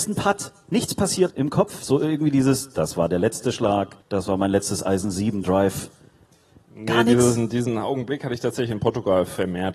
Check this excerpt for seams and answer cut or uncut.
cut